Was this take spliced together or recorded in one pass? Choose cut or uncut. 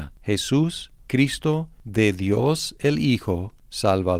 uncut